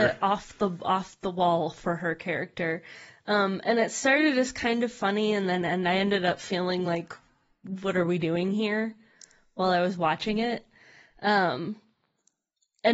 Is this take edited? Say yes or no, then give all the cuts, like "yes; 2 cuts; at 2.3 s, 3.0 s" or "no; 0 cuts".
no; 0 cuts